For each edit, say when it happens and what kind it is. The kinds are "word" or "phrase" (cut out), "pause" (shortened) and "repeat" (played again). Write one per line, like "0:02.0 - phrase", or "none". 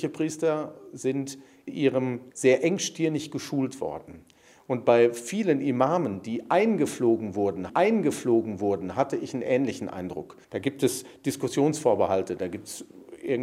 0:01.7 - word
0:02.3 - phrase
0:07.7 - repeat
0:10.4 - pause